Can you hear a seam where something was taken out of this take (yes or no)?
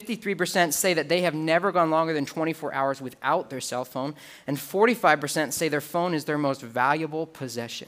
no